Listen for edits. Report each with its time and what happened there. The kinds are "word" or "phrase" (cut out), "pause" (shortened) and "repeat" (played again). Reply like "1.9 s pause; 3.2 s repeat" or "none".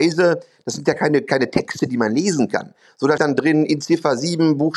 3.2 s word